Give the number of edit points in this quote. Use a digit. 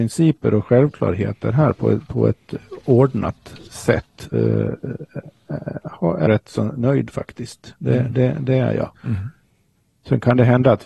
3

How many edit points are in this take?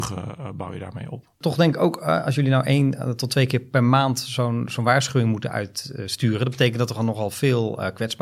0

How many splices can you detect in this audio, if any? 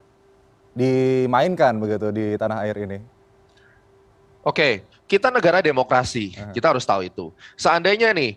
0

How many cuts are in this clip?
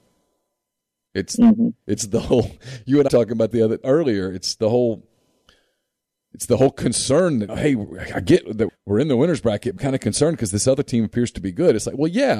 7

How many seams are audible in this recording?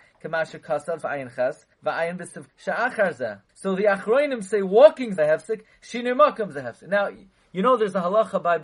5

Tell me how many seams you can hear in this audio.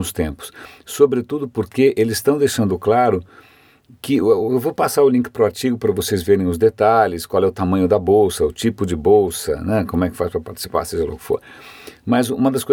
0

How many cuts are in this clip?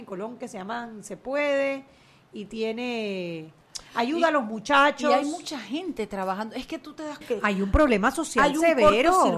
1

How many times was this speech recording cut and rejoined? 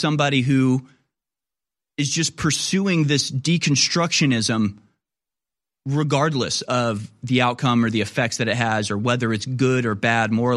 0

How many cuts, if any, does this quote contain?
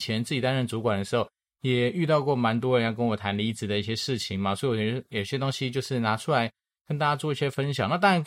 0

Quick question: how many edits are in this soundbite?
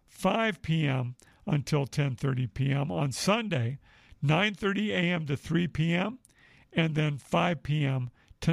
0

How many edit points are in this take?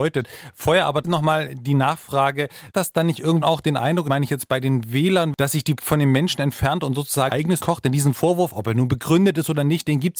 7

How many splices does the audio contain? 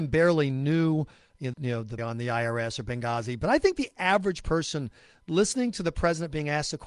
2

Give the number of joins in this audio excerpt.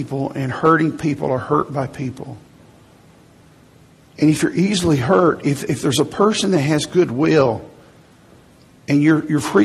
0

